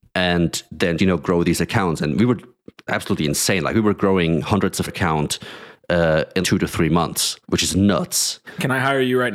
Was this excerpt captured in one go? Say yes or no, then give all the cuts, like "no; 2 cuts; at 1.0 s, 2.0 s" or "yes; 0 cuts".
no; 5 cuts; at 1.0 s, 2.9 s, 4.9 s, 6.4 s, 7.4 s